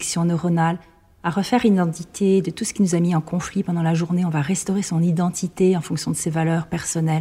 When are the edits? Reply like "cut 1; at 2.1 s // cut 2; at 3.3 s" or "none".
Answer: none